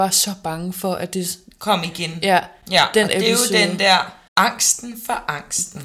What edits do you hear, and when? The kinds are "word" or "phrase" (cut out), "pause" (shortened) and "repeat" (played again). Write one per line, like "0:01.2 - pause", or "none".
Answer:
0:04.3 - pause